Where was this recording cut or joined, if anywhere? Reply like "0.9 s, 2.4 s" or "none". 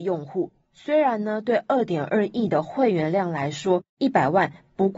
3.9 s